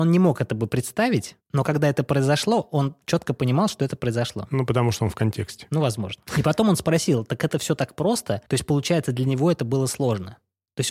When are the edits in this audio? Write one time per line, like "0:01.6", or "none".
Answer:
0:08.5